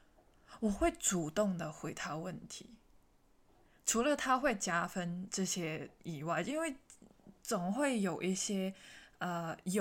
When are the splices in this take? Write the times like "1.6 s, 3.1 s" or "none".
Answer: 6.0 s